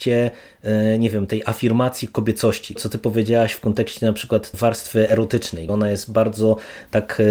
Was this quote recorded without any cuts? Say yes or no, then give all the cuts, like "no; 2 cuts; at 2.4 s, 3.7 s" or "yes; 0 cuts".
no; 3 cuts; at 2.8 s, 4.5 s, 5.7 s